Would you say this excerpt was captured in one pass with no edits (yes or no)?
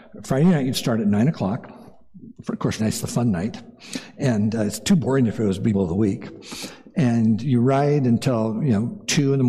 no